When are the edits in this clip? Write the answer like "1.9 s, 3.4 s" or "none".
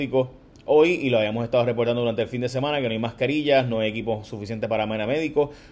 none